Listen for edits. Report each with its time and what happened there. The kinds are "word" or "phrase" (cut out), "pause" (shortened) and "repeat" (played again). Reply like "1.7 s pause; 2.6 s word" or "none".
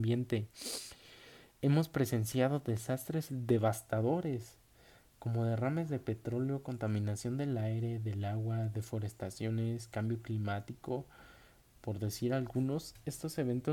1.5 s pause; 3.3 s word